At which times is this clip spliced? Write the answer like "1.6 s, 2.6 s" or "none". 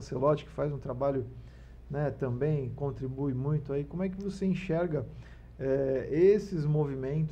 none